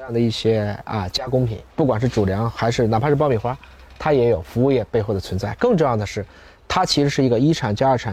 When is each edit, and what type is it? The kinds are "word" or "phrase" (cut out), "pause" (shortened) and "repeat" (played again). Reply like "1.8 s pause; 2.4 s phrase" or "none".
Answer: 1.7 s pause